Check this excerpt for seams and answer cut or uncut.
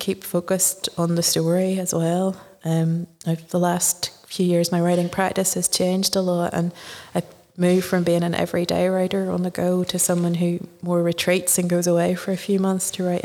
uncut